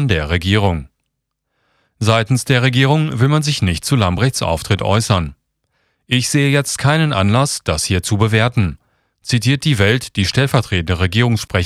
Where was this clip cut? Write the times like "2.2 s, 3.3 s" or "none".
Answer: none